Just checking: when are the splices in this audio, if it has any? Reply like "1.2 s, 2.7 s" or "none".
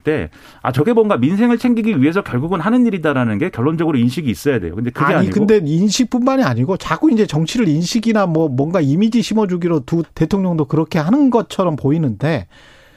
10.0 s